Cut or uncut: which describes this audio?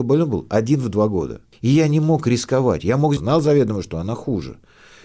cut